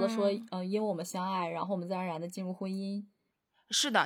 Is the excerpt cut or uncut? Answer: uncut